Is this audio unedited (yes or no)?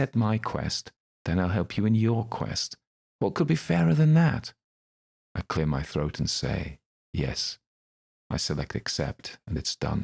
yes